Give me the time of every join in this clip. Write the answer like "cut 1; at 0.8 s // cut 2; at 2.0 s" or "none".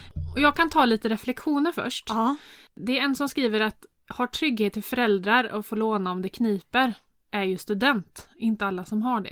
none